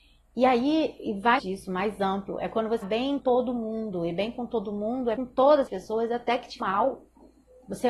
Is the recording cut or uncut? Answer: cut